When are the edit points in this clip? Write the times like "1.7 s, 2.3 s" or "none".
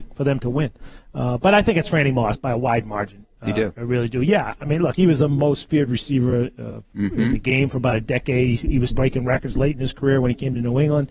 8.9 s

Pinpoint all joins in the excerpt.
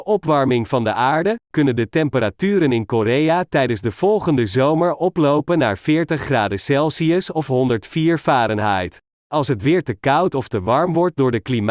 9.1 s

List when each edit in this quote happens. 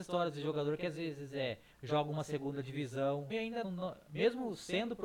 1.7 s, 3.3 s, 3.6 s

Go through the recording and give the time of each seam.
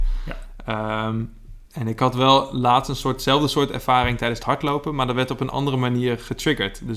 1.6 s

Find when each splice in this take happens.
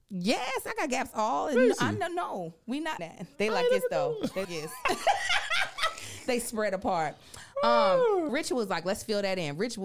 3.0 s, 4.4 s, 8.3 s

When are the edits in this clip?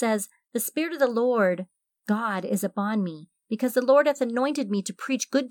none

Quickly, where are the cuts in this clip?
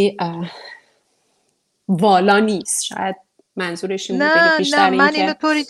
none

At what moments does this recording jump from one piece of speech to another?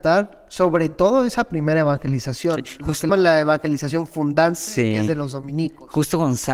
3.1 s

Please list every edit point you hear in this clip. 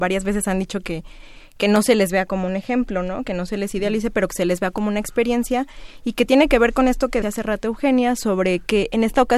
7.2 s

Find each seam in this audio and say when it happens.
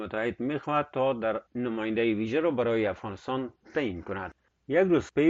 1.5 s

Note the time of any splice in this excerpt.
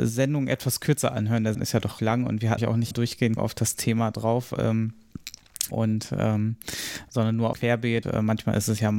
1.5 s, 2.0 s, 2.6 s, 2.9 s, 3.4 s, 5.7 s, 7.5 s, 8.0 s

